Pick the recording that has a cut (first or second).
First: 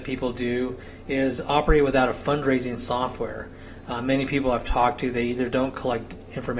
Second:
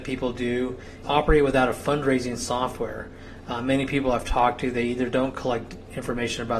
second